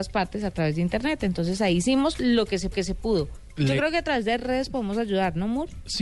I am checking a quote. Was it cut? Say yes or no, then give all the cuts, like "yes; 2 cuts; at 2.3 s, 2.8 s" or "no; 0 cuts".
yes; 1 cut; at 2.7 s